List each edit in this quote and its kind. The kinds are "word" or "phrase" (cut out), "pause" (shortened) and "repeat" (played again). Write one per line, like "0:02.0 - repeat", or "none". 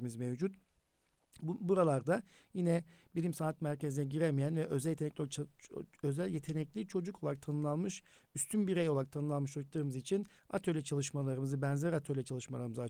none